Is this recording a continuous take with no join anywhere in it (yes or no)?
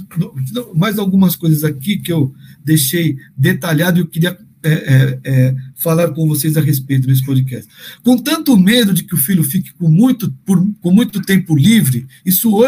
yes